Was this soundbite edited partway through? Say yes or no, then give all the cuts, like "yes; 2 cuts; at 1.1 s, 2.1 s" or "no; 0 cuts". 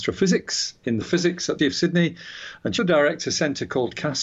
yes; 3 cuts; at 1.0 s, 1.6 s, 2.8 s